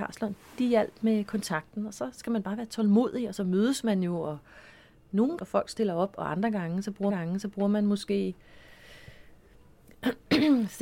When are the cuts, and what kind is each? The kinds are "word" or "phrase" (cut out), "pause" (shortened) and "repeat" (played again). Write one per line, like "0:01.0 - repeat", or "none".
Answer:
0:05.4 - phrase
0:07.1 - repeat